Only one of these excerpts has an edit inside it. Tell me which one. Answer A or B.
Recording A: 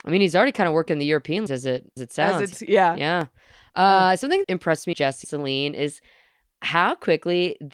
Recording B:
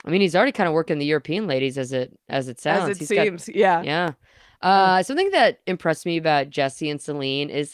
A